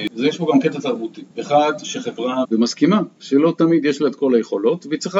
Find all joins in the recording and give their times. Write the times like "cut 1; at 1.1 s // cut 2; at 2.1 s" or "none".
cut 1; at 1.3 s // cut 2; at 2.4 s